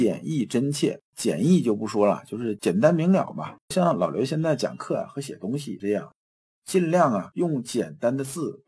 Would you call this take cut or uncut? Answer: cut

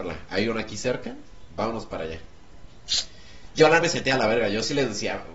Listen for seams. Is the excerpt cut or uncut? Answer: cut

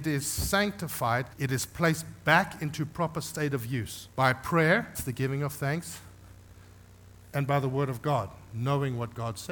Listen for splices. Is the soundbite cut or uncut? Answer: cut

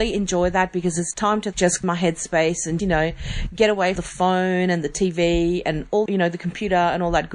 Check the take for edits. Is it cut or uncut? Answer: cut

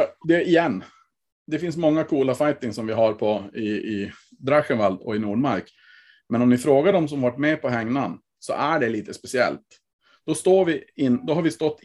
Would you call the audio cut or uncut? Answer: uncut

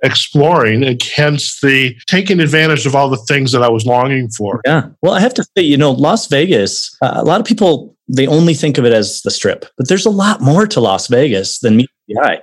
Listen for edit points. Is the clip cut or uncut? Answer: uncut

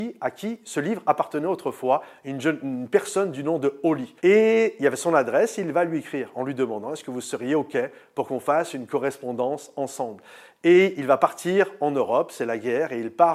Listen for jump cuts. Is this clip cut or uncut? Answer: cut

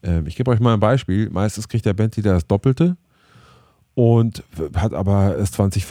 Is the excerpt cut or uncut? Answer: uncut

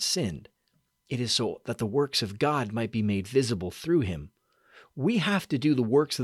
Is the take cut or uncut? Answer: uncut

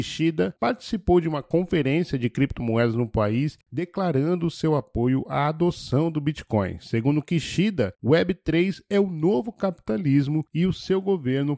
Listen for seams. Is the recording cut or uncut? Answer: uncut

